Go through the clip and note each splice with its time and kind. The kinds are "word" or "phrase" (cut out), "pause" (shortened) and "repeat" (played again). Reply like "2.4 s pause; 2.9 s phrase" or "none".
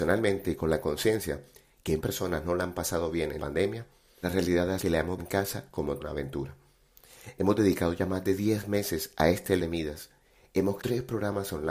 2.0 s word; 3.4 s word; 4.2 s word; 4.8 s word; 5.2 s word; 6.0 s word; 9.6 s word; 10.8 s word